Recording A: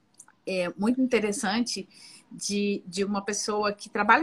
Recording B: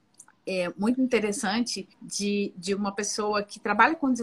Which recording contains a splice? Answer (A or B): B